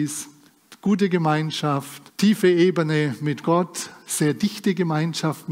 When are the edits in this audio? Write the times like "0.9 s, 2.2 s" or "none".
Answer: 2.1 s